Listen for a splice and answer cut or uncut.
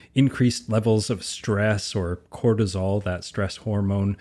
uncut